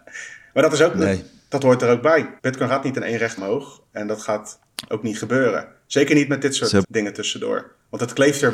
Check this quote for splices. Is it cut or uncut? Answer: cut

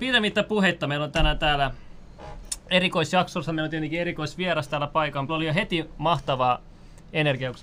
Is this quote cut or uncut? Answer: cut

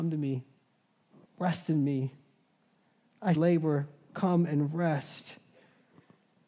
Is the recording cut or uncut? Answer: cut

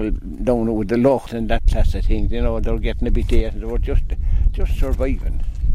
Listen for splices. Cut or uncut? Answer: cut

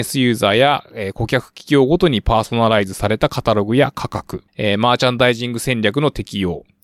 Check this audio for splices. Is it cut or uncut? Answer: cut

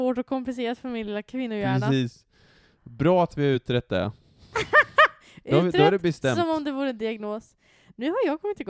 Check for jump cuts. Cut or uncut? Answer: uncut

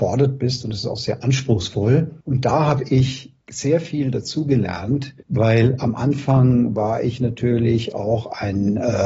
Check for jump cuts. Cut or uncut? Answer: cut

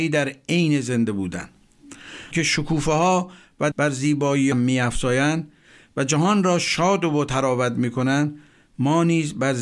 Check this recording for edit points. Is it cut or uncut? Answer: cut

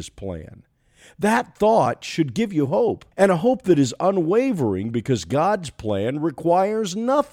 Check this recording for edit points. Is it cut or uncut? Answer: cut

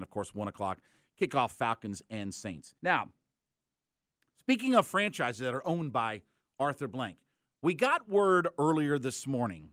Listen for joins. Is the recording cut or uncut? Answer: cut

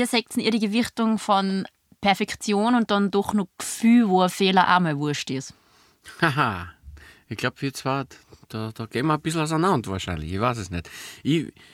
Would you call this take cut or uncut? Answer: uncut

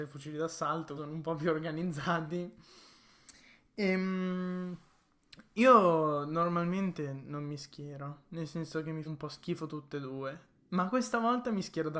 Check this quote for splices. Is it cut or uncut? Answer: cut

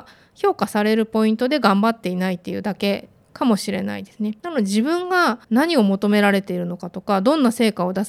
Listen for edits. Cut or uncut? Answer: cut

